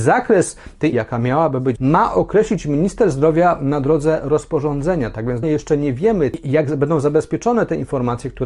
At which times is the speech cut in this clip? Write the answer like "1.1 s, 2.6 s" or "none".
0.9 s, 1.8 s, 5.4 s